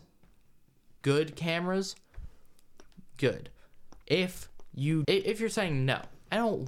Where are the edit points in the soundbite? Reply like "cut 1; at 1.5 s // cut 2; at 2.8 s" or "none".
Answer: cut 1; at 1.0 s // cut 2; at 5.0 s

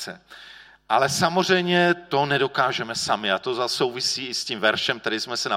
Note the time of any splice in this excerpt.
none

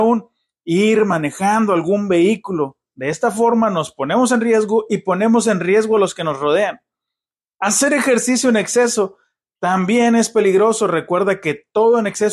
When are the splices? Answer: none

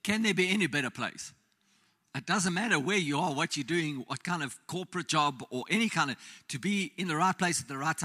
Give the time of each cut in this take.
none

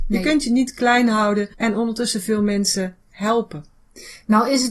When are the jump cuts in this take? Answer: cut 1; at 1.5 s

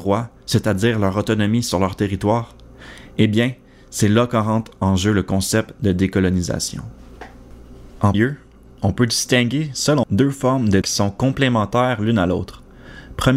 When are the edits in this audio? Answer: cut 1; at 8.1 s // cut 2; at 10.0 s // cut 3; at 10.8 s

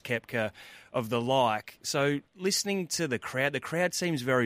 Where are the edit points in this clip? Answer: cut 1; at 2.3 s

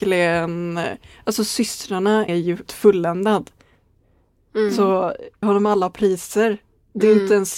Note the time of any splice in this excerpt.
cut 1; at 2.3 s // cut 2; at 2.7 s // cut 3; at 5.4 s

